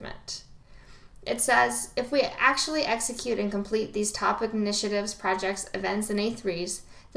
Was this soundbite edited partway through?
no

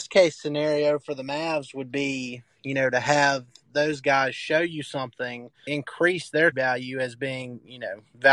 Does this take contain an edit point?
yes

